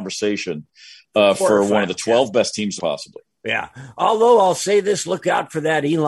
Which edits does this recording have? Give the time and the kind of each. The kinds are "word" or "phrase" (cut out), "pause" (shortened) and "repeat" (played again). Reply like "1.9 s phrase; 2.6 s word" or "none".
2.8 s phrase